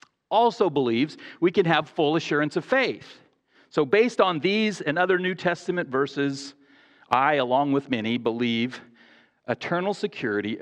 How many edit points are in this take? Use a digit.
0